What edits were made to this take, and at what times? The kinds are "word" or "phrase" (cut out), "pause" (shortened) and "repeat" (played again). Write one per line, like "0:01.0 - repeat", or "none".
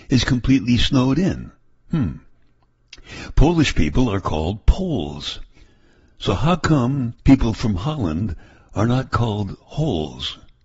0:07.2 - pause